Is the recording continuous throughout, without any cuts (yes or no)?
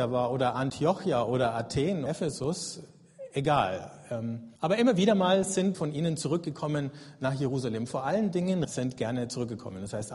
no